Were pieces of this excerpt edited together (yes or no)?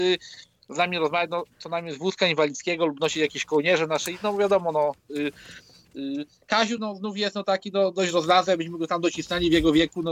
no